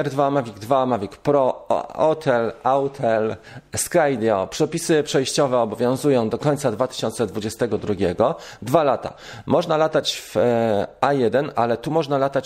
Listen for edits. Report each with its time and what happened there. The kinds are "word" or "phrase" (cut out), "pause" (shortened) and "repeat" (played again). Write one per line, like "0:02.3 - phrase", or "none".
none